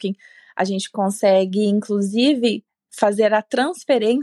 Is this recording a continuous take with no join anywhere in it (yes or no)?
yes